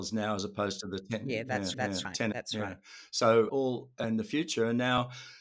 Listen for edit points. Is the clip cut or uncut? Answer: cut